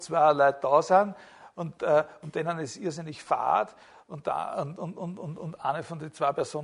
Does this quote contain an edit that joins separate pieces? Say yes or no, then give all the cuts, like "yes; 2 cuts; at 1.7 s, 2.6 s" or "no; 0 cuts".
no; 0 cuts